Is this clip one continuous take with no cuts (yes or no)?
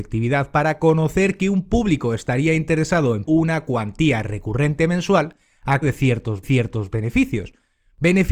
no